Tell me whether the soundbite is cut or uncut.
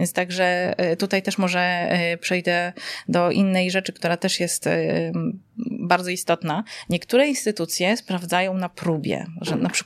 uncut